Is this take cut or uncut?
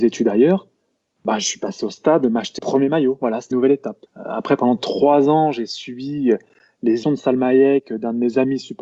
cut